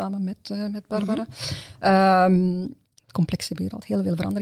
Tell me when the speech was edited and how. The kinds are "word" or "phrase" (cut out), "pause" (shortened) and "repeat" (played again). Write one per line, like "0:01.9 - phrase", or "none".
0:03.0 - word